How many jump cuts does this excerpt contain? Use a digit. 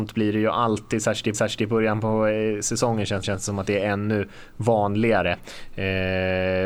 2